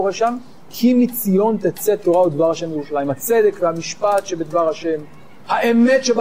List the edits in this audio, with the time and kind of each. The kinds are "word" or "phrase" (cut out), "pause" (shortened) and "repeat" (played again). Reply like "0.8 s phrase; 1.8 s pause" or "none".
none